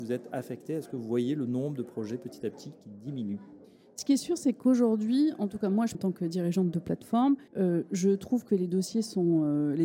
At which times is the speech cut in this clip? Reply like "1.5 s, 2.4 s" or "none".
5.9 s, 7.5 s